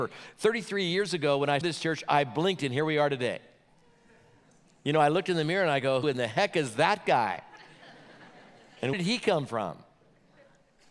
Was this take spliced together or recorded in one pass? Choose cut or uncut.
cut